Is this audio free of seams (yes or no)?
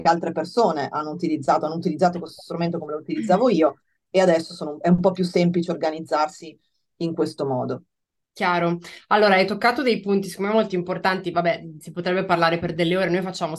yes